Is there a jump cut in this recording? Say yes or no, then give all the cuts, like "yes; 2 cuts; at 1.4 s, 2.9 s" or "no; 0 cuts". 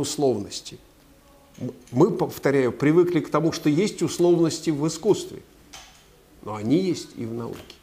no; 0 cuts